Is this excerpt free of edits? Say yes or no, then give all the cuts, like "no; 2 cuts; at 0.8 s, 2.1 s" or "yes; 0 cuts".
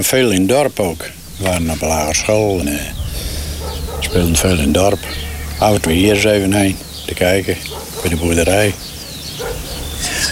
no; 2 cuts; at 2.6 s, 5.9 s